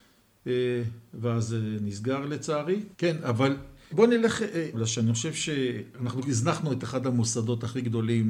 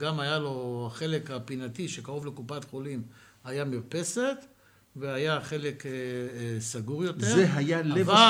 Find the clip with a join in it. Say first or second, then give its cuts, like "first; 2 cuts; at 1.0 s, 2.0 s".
first; 3 cuts; at 2.9 s, 3.9 s, 4.7 s